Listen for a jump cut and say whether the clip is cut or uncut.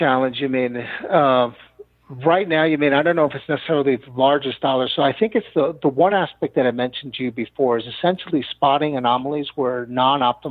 uncut